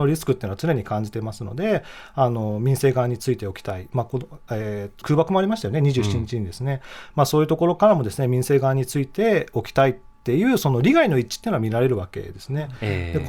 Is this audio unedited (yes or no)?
no